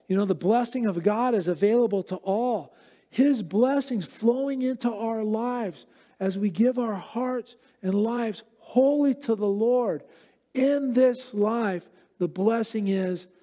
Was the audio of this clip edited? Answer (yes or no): no